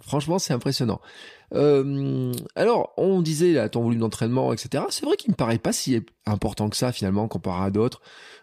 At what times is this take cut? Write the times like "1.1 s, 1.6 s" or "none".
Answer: none